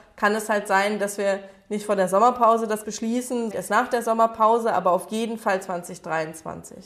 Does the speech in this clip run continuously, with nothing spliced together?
no; 2 cuts; at 2.8 s, 3.5 s

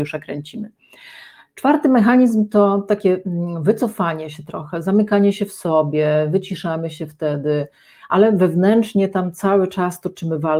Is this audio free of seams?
yes; 0 cuts

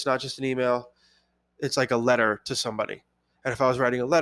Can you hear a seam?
no; 0 cuts

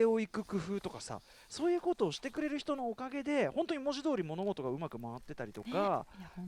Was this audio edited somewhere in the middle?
no; 0 cuts

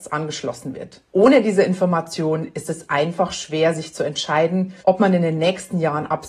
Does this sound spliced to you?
yes; 2 cuts; at 1.1 s, 4.8 s

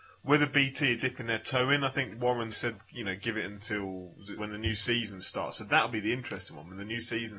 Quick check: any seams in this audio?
yes; 3 cuts; at 1.0 s, 2.5 s, 4.4 s

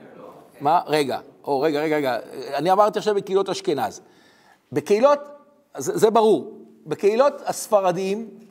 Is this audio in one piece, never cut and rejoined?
yes; 0 cuts

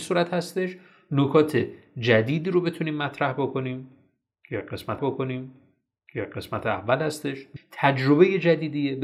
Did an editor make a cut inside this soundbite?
yes; 2 cuts; at 5.0 s, 7.6 s

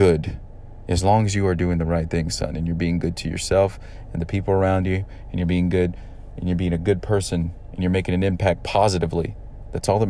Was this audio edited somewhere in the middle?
no; 0 cuts

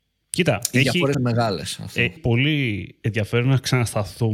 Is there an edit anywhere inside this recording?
yes; 2 cuts; at 1.1 s, 2.2 s

